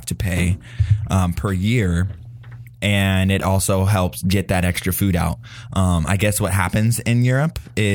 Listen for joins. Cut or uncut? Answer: uncut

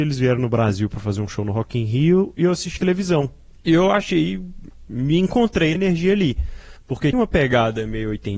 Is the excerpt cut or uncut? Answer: cut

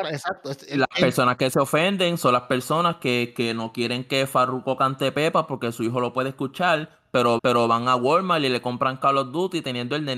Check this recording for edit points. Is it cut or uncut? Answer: cut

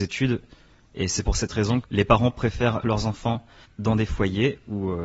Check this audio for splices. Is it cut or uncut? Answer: cut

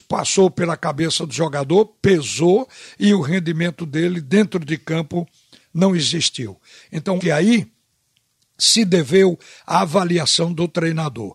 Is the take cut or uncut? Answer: cut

